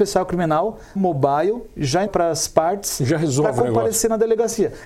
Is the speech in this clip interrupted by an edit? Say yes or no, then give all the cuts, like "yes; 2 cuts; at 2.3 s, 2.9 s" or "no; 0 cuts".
yes; 2 cuts; at 1.0 s, 2.1 s